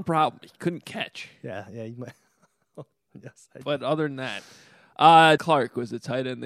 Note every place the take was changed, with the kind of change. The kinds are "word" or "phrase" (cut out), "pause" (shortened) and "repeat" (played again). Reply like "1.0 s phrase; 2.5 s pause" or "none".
5.4 s word